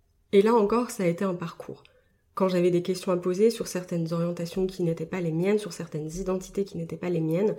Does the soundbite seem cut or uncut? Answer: uncut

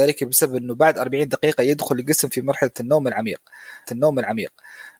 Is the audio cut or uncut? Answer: cut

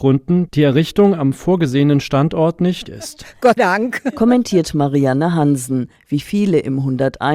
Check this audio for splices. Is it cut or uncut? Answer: cut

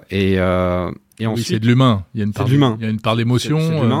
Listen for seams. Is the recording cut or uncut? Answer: uncut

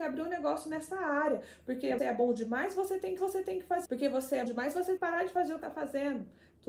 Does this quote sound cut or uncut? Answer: cut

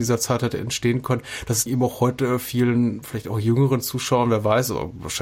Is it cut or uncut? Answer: cut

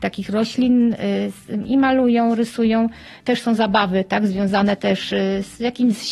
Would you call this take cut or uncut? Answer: uncut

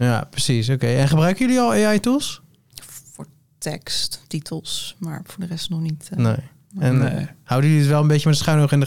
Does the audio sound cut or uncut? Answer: uncut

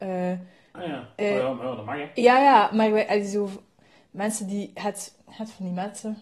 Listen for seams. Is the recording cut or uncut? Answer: uncut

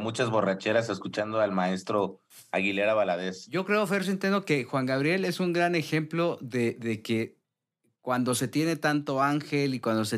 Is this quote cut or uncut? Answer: uncut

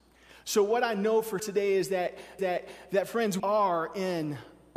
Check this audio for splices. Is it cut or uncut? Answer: cut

